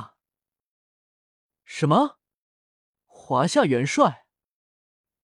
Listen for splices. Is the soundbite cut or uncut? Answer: uncut